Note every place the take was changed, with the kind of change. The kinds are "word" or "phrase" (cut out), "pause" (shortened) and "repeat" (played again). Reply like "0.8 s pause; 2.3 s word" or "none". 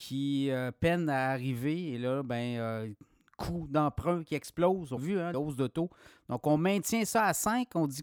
5.0 s word; 5.3 s word